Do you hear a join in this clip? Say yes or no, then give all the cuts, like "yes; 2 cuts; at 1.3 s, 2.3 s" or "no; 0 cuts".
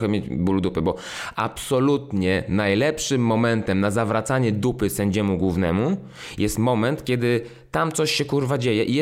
no; 0 cuts